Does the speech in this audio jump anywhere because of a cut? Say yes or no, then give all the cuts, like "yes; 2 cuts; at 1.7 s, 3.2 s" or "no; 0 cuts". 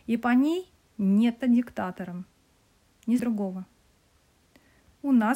yes; 2 cuts; at 1.4 s, 3.2 s